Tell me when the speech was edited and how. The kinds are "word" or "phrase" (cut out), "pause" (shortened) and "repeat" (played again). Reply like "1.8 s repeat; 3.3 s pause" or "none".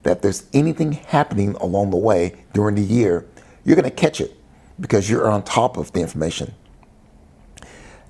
none